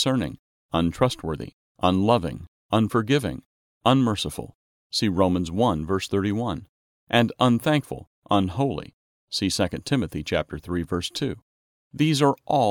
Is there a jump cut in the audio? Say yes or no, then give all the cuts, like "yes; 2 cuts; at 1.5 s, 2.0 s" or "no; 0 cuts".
no; 0 cuts